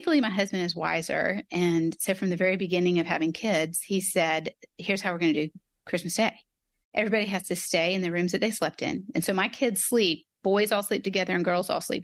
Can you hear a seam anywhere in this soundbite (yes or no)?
no